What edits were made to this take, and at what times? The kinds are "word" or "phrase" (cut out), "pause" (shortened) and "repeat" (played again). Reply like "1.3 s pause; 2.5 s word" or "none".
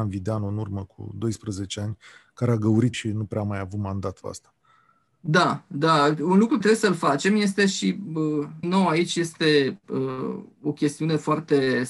2.9 s phrase; 4.2 s word; 6.6 s word; 8.6 s word